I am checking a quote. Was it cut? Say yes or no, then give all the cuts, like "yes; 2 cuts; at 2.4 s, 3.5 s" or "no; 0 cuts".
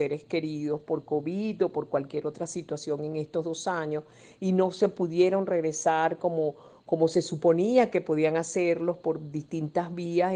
no; 0 cuts